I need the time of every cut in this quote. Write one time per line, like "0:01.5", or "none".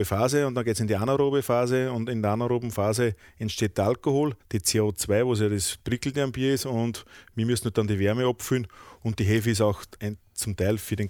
0:04.4